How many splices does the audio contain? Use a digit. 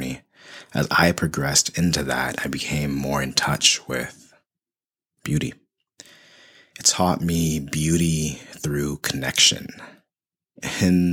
0